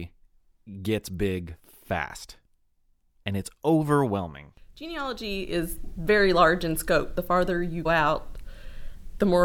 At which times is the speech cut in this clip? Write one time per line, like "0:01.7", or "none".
0:07.9

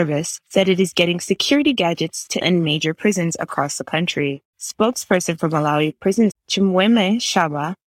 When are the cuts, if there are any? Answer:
0:02.4
0:06.3

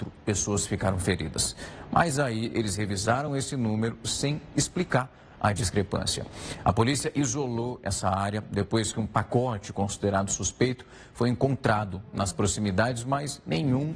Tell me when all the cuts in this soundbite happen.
none

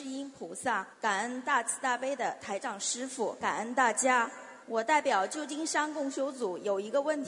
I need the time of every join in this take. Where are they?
0:00.9
0:03.4
0:04.6

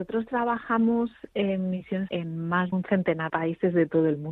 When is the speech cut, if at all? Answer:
0:02.1
0:02.7
0:03.3

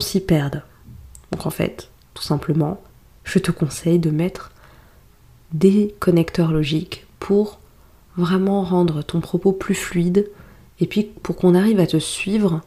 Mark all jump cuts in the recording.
none

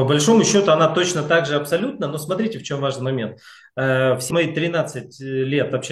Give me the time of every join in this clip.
0:04.3

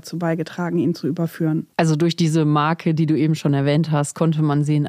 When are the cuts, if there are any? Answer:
0:01.7

